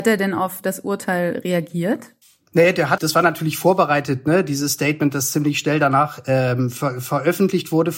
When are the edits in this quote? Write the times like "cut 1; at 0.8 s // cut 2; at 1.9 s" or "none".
cut 1; at 2.2 s // cut 2; at 3.0 s

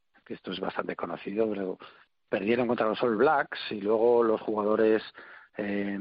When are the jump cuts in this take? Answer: none

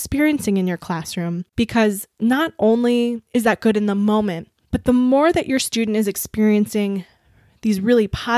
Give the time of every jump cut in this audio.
cut 1; at 1.5 s // cut 2; at 4.6 s

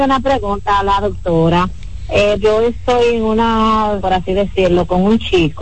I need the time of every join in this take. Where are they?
cut 1; at 2.4 s // cut 2; at 4.0 s

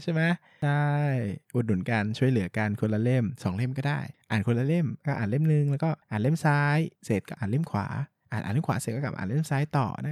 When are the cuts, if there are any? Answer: cut 1; at 6.0 s // cut 2; at 7.0 s

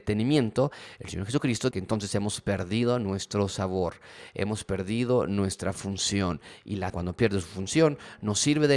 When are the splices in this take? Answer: cut 1; at 1.7 s // cut 2; at 6.9 s

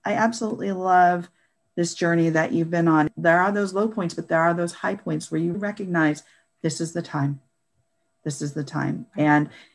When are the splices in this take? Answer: cut 1; at 5.5 s

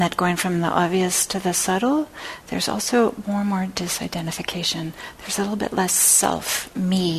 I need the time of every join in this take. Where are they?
none

